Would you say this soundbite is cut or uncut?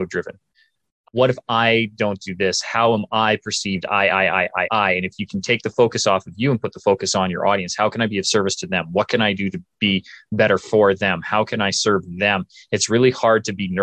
uncut